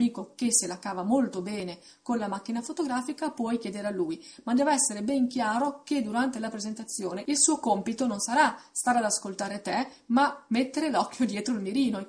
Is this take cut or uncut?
uncut